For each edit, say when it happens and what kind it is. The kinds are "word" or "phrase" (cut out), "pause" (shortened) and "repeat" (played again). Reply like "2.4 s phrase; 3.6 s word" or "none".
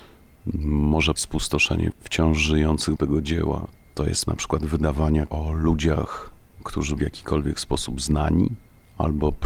1.1 s word; 1.9 s word; 3.0 s word; 4.3 s word; 5.3 s word; 7.0 s word